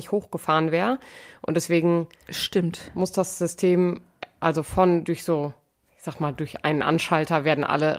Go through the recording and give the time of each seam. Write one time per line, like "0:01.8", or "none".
none